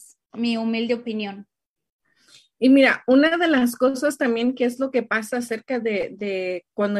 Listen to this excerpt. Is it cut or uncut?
uncut